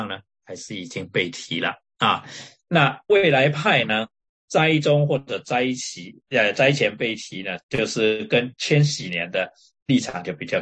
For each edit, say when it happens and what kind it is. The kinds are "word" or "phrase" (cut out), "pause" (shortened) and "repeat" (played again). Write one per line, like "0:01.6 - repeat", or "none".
0:03.0 - pause
0:07.6 - pause